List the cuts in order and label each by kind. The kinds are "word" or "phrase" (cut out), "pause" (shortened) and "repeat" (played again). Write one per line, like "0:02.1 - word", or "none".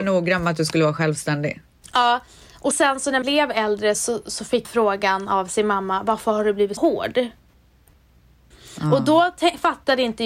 0:02.7 - word
0:03.2 - word
0:03.9 - word
0:04.6 - word
0:06.8 - word